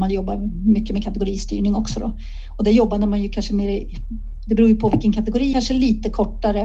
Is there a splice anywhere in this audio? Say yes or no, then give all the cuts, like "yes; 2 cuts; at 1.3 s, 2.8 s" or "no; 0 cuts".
yes; 1 cut; at 5.5 s